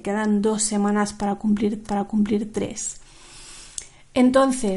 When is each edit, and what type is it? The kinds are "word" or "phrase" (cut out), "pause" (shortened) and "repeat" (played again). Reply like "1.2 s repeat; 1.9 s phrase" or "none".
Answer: 1.8 s repeat